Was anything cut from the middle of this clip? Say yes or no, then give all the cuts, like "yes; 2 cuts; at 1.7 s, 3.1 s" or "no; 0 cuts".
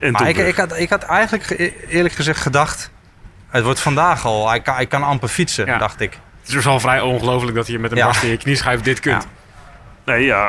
no; 0 cuts